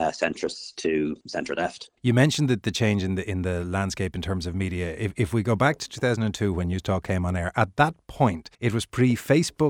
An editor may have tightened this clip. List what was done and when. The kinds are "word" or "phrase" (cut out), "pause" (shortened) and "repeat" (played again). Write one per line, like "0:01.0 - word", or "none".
0:01.2 - pause
0:02.0 - pause
0:08.5 - pause